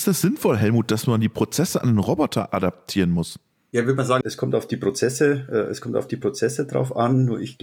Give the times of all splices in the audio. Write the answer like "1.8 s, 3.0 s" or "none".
none